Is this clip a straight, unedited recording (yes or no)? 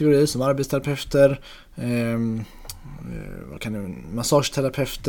yes